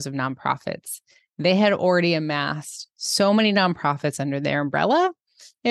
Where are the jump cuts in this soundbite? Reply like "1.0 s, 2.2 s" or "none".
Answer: none